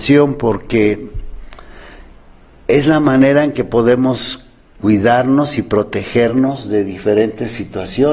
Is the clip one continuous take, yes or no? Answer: yes